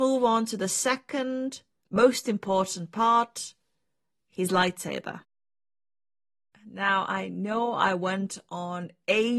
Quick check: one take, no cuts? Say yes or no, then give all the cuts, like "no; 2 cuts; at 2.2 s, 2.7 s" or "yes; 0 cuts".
yes; 0 cuts